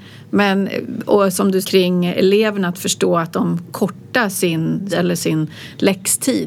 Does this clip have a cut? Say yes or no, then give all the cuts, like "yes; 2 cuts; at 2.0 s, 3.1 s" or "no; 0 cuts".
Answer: yes; 3 cuts; at 1.6 s, 3.7 s, 4.9 s